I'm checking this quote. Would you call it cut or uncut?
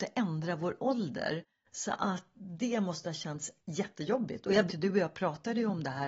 cut